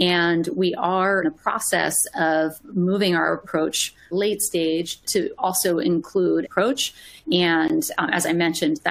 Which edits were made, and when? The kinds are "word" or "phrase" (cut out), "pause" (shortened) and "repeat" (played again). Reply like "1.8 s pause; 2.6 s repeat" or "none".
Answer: 1.2 s word; 4.1 s phrase; 5.0 s word; 6.4 s phrase